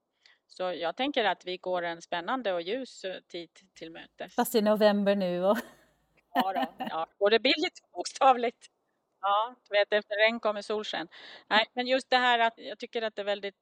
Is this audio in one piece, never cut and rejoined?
no; 2 cuts; at 7.1 s, 12.6 s

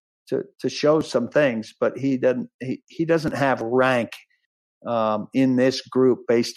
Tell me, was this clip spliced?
no; 0 cuts

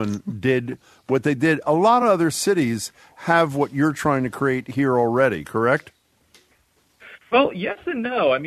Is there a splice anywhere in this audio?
no; 0 cuts

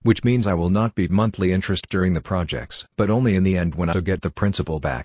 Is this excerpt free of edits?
no; 4 cuts; at 1.1 s, 1.9 s, 2.9 s, 3.9 s

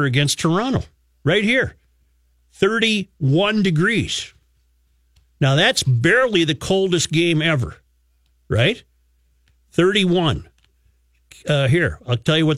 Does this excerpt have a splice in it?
no; 0 cuts

